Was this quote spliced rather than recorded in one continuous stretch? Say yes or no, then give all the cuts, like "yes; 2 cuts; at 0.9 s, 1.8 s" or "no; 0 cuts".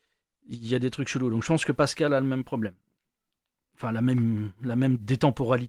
no; 0 cuts